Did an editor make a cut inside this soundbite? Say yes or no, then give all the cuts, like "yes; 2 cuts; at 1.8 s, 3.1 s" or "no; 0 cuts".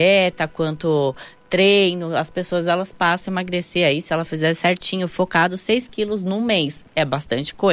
no; 0 cuts